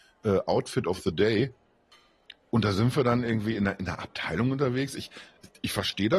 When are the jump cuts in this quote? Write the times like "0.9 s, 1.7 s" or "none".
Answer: none